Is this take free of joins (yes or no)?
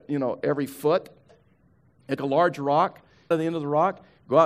no